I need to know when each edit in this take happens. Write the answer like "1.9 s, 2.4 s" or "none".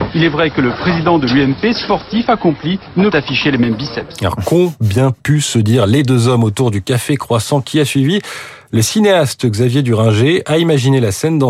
3.1 s